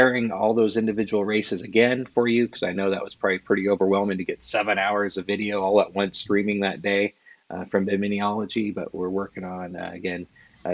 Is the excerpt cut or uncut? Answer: uncut